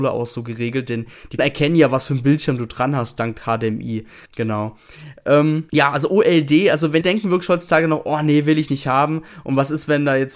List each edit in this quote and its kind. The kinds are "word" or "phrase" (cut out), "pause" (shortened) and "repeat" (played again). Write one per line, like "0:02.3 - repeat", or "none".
0:01.4 - word
0:04.3 - pause
0:05.7 - pause
0:07.0 - phrase